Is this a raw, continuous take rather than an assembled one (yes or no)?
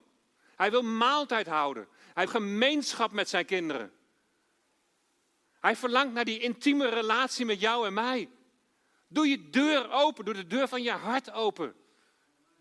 no